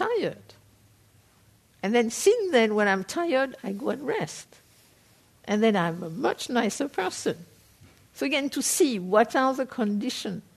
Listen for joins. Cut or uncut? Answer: uncut